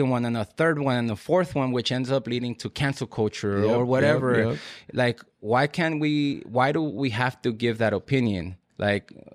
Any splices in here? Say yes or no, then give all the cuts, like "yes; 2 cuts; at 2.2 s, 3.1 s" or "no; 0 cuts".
no; 0 cuts